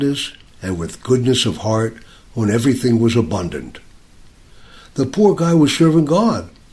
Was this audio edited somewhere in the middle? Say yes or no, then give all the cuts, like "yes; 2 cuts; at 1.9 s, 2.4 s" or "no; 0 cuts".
no; 0 cuts